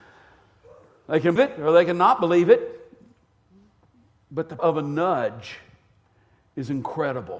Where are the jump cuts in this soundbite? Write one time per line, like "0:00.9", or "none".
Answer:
0:01.4
0:04.6